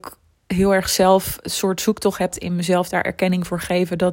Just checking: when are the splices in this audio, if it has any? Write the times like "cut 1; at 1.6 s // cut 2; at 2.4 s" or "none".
cut 1; at 2.3 s